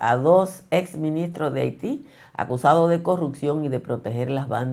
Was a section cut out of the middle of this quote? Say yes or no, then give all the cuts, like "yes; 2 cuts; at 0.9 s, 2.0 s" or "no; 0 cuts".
no; 0 cuts